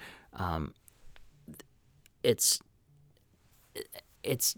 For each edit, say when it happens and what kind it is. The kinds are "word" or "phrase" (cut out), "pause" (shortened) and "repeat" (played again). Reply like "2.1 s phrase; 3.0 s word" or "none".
none